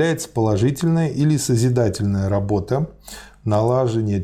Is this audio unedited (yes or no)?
yes